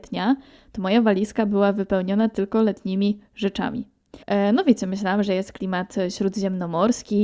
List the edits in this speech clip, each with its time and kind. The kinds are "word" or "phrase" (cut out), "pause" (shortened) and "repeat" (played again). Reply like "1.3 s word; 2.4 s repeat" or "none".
4.2 s pause